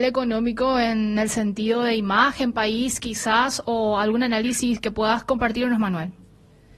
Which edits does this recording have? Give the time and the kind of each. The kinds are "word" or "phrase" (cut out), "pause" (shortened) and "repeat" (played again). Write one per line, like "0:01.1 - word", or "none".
none